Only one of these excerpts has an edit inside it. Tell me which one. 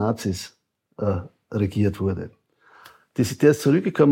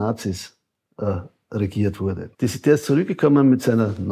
second; 1 cut; at 2.3 s

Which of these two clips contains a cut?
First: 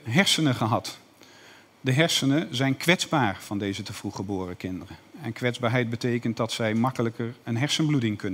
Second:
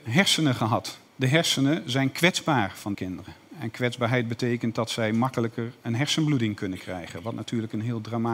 second; 2 cuts; at 1.1 s, 2.9 s

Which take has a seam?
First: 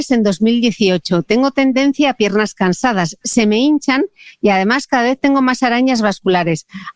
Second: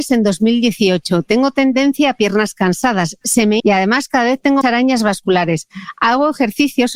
second; 2 cuts; at 3.6 s, 4.6 s

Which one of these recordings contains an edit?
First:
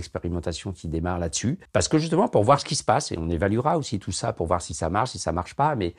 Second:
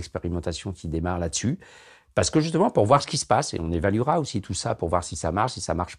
first; 1 cut; at 1.7 s

